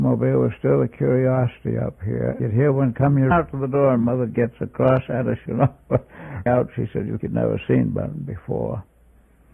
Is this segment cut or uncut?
cut